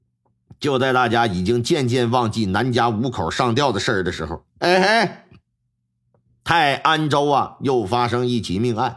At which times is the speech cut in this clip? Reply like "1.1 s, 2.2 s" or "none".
4.5 s